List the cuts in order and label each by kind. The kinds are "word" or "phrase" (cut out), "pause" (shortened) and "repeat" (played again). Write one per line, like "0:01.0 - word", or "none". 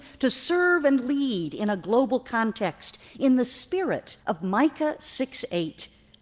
0:04.2 - pause